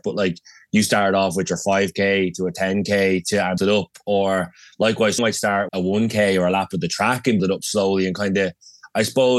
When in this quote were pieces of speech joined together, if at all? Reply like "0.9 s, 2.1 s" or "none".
3.6 s, 5.2 s, 5.7 s, 7.4 s